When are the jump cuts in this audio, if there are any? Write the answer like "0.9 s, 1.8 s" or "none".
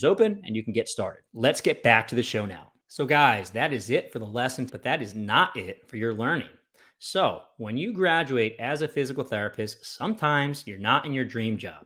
4.7 s